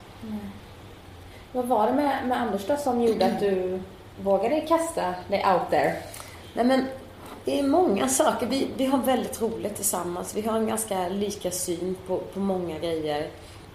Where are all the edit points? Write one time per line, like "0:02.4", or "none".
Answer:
none